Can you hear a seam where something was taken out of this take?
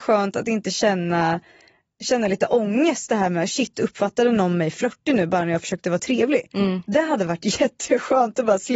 no; 0 cuts

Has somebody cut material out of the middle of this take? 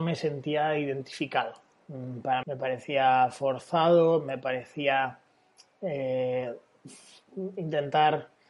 yes; 1 cut; at 2.4 s

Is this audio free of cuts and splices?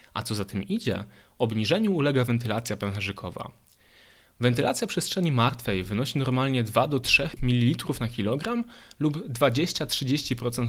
yes; 0 cuts

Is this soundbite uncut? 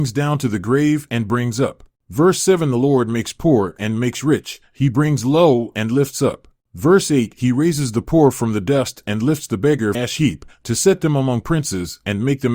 no; 1 cut; at 9.9 s

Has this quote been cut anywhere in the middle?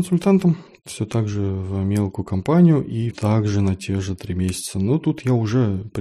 yes; 1 cut; at 3.1 s

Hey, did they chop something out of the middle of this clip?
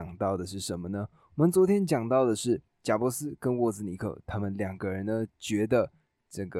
yes; 1 cut; at 2.7 s

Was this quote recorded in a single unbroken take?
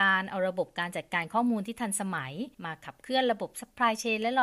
no; 1 cut; at 2.5 s

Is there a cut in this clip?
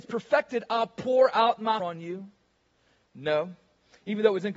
yes; 1 cut; at 1.8 s

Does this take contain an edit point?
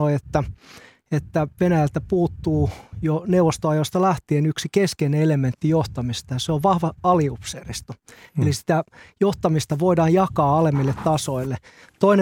no; 0 cuts

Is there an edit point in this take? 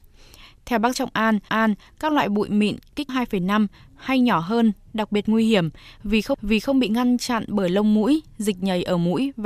yes; 4 cuts; at 0.9 s, 1.5 s, 3.1 s, 6.3 s

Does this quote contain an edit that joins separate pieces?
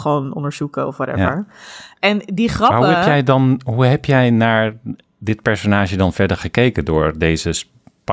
no; 0 cuts

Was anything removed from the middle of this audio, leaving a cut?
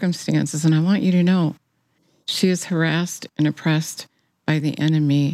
no; 0 cuts

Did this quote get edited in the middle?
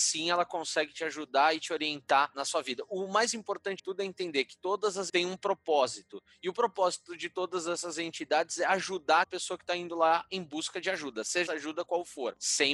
yes; 4 cuts; at 3.8 s, 5.1 s, 9.2 s, 11.5 s

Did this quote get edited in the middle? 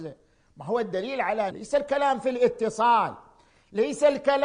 yes; 1 cut; at 1.5 s

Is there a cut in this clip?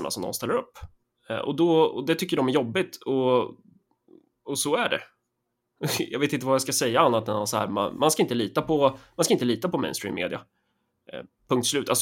no; 0 cuts

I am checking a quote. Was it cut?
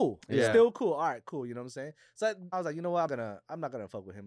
yes; 2 cuts; at 2.5 s, 3.1 s

